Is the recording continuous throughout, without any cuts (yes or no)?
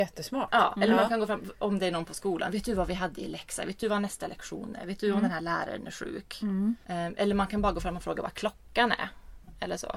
yes